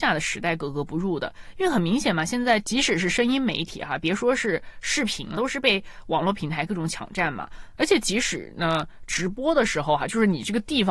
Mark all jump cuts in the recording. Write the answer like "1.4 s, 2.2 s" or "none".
5.3 s